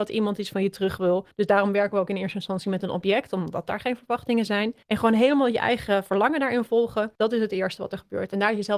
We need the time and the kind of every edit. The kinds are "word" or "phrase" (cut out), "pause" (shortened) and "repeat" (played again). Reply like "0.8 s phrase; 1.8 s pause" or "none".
1.3 s pause; 4.8 s pause; 7.1 s pause